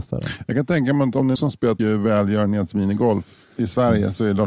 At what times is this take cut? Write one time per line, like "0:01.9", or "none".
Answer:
0:01.4
0:01.8